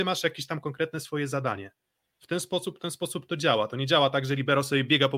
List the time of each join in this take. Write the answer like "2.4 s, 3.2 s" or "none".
none